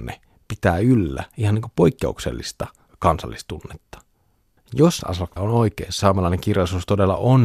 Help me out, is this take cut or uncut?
cut